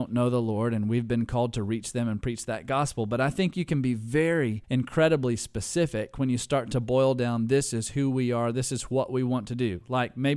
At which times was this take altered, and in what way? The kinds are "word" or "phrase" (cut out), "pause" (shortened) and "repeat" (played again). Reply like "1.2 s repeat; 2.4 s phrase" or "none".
4.6 s pause